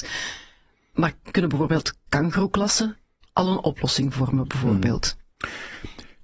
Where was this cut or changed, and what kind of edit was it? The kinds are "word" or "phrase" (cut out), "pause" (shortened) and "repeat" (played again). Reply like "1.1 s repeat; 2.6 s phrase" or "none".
none